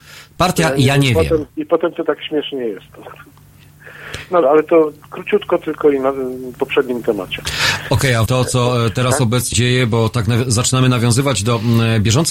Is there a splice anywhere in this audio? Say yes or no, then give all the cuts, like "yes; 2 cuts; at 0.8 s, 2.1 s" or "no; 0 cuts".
yes; 5 cuts; at 1.5 s, 4.4 s, 6.5 s, 8.3 s, 9.5 s